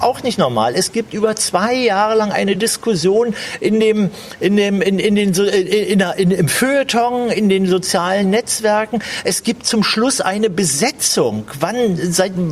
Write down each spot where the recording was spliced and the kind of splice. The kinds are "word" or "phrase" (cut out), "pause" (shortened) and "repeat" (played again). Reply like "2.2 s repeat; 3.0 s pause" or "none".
none